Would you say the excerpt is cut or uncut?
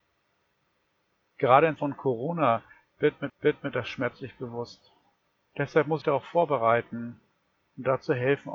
cut